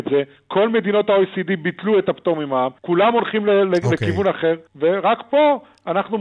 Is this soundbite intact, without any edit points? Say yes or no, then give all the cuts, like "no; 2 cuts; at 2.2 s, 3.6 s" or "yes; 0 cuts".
no; 2 cuts; at 2.8 s, 4.7 s